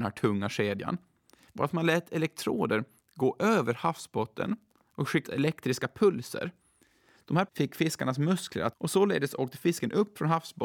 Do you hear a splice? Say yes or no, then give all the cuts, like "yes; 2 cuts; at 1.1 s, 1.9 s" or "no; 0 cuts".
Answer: yes; 3 cuts; at 5.2 s, 7.5 s, 8.7 s